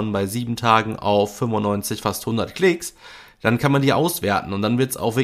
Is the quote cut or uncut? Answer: uncut